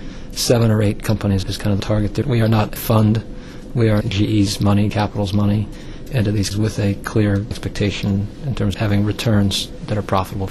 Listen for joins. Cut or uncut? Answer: cut